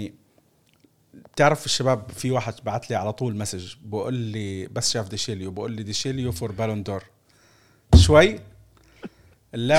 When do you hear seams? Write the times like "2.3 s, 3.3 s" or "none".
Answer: none